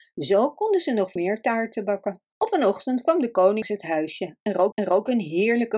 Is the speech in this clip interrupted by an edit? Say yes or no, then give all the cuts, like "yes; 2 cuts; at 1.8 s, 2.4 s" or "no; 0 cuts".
yes; 4 cuts; at 1.2 s, 2.3 s, 3.6 s, 4.7 s